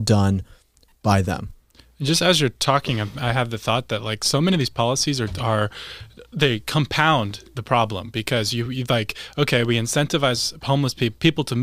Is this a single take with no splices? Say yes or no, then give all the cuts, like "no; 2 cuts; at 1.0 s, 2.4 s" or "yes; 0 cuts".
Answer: yes; 0 cuts